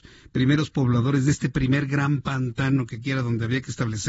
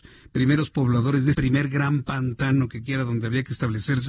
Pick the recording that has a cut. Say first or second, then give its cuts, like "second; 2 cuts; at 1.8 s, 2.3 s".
second; 1 cut; at 1.3 s